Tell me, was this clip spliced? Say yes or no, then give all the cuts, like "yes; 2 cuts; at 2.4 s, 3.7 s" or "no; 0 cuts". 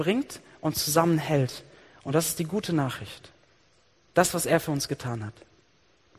no; 0 cuts